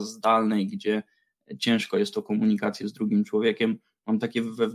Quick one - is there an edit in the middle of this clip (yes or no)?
no